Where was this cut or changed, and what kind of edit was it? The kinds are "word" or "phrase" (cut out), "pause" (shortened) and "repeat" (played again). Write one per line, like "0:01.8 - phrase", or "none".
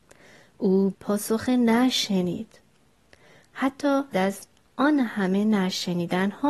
0:00.9 - phrase
0:04.1 - word